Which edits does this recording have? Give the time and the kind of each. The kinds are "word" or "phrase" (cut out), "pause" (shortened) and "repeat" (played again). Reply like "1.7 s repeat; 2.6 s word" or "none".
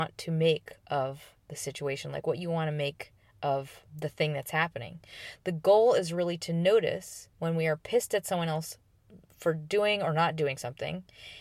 3.9 s pause; 7.3 s pause